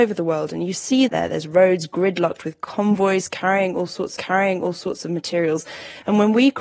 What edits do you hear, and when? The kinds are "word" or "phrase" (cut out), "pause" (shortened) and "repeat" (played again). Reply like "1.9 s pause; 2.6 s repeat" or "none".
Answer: 1.1 s word; 4.2 s repeat